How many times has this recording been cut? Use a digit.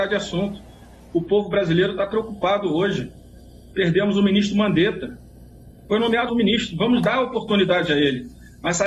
1